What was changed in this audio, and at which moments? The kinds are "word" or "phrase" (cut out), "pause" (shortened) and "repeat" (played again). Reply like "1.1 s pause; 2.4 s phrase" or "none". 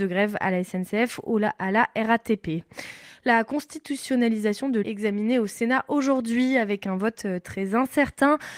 4.8 s word